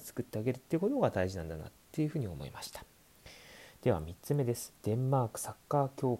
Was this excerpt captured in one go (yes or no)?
no